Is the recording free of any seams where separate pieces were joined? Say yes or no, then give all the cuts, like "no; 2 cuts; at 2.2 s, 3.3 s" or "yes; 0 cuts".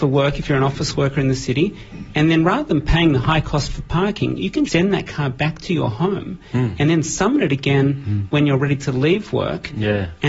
no; 1 cut; at 4.7 s